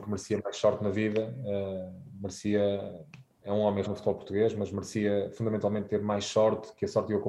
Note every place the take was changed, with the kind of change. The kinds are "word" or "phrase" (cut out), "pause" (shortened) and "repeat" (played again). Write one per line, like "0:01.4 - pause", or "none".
0:03.8 - word
0:05.9 - word